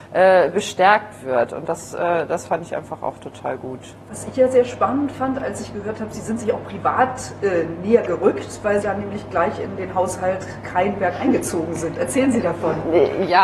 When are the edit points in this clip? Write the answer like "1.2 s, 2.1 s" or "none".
4.0 s, 8.8 s